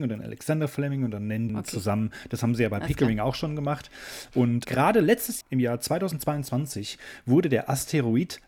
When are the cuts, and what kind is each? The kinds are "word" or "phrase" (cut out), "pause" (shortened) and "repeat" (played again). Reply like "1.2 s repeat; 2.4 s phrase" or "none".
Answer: 1.5 s phrase; 4.6 s word; 5.4 s word